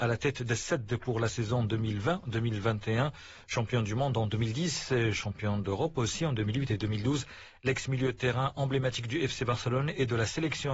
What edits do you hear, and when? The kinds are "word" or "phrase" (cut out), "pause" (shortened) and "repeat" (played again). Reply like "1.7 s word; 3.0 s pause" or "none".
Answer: none